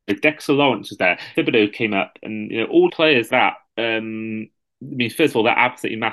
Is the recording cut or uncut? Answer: cut